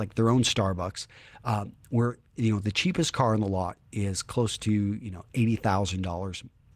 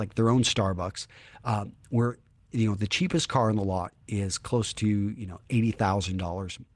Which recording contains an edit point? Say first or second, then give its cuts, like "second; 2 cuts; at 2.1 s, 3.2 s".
first; 1 cut; at 2.3 s